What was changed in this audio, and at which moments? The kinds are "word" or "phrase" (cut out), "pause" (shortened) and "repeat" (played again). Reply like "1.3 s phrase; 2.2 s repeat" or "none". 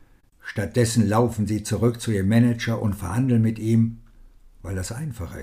none